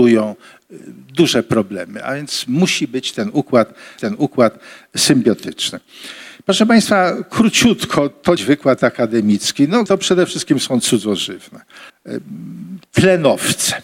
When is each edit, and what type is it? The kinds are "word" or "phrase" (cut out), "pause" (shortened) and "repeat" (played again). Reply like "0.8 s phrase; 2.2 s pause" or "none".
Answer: 4.0 s repeat; 8.4 s phrase; 9.9 s word; 11.9 s pause